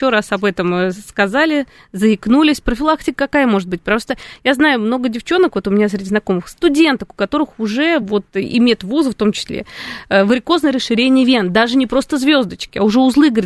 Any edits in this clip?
no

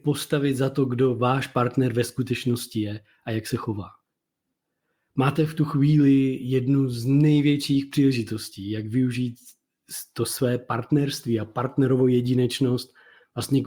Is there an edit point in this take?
no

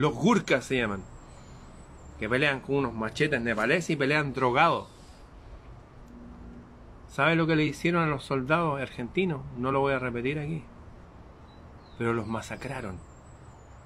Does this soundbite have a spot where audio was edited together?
no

